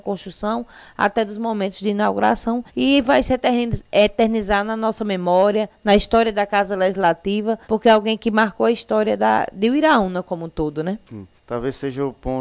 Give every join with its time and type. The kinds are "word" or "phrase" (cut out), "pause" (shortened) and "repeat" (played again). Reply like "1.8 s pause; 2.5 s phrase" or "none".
2.7 s pause; 7.6 s pause; 11.4 s pause

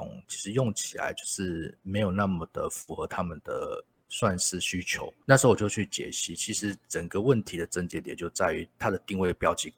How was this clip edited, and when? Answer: none

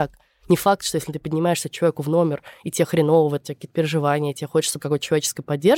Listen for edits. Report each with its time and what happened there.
3.4 s word; 4.8 s word

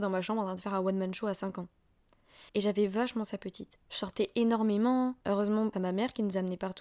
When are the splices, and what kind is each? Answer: 2.5 s pause; 5.7 s word

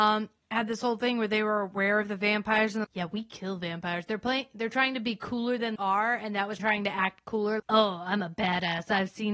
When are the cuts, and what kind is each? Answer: 2.8 s word; 5.8 s word; 6.6 s phrase; 7.6 s word

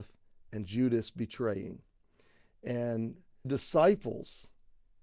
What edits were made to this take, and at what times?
3.4 s word

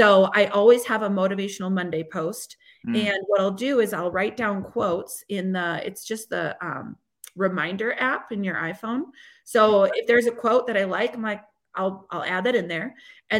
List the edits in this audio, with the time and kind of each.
none

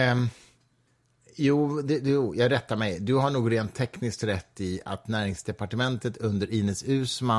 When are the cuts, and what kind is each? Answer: none

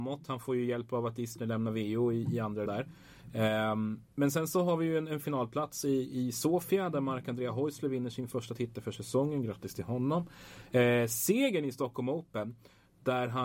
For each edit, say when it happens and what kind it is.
2.7 s word

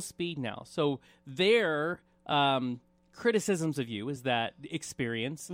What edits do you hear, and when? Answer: none

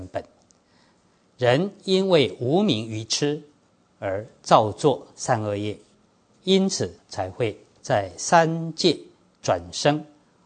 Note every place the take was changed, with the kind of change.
none

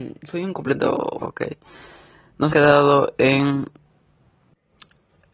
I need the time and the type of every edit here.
1.2 s word; 2.5 s word

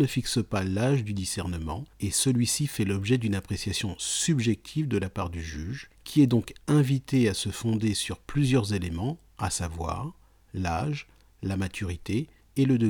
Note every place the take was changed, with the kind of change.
1.9 s pause

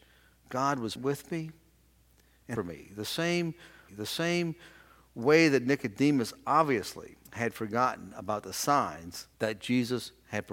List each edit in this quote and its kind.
1.0 s word; 2.6 s phrase; 3.9 s repeat; 7.3 s pause; 9.3 s pause

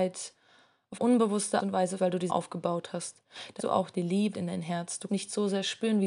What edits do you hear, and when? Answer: 1.0 s word; 1.6 s word; 2.0 s word; 2.3 s word; 3.6 s word; 4.3 s word; 5.1 s word

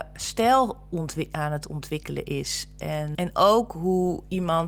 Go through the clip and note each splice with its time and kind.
3.1 s word

